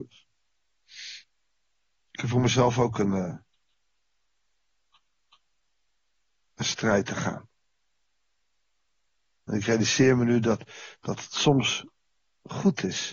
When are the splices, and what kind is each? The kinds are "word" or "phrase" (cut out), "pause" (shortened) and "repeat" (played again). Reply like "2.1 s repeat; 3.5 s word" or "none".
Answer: none